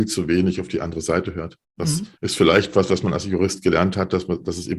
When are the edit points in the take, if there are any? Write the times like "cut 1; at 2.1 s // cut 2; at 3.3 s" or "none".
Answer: cut 1; at 1.6 s // cut 2; at 2.2 s